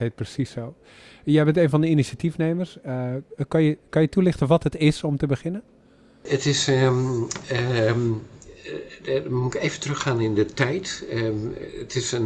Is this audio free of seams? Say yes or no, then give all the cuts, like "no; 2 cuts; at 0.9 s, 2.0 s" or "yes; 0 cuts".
yes; 0 cuts